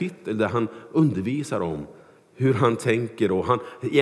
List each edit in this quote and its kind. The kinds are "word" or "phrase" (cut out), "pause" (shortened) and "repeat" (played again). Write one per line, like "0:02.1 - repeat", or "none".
none